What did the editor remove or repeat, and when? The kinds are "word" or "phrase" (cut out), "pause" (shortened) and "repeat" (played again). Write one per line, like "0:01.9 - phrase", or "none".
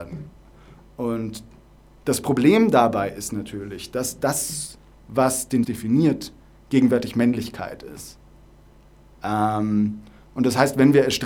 0:05.6 - word